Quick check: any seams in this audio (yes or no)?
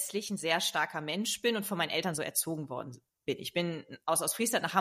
no